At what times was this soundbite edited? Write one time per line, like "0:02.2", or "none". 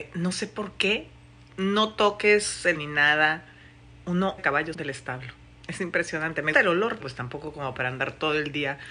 0:01.5
0:02.7
0:04.4
0:04.7
0:06.5
0:07.0